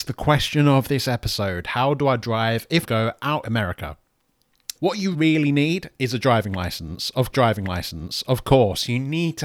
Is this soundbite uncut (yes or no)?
no